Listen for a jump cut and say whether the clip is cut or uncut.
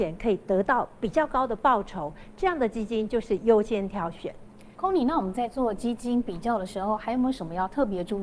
cut